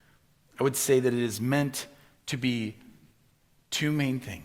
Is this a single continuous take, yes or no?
yes